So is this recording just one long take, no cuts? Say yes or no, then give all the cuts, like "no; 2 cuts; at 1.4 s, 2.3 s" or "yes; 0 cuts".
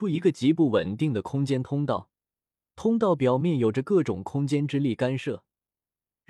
yes; 0 cuts